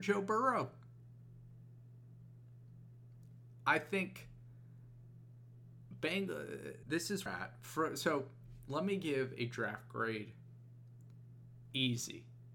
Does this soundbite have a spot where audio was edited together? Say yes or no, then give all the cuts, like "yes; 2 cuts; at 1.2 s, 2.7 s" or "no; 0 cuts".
yes; 2 cuts; at 6.8 s, 7.3 s